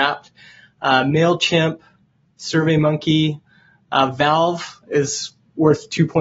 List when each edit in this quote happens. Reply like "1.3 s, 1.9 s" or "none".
none